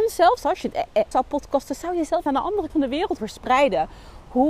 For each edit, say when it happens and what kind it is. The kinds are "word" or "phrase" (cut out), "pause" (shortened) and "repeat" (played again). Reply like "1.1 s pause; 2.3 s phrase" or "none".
1.1 s word; 2.3 s phrase; 2.7 s word; 3.2 s word